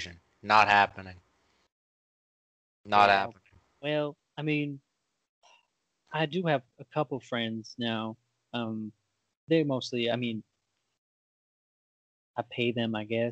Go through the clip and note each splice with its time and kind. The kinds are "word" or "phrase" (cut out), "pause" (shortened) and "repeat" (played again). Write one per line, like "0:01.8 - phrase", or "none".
none